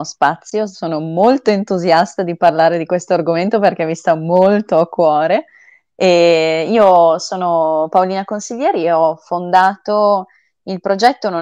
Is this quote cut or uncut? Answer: uncut